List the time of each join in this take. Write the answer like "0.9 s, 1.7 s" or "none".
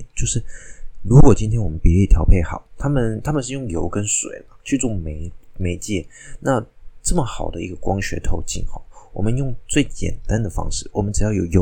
4.6 s